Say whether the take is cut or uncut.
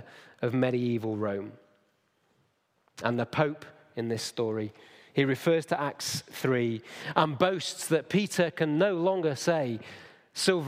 uncut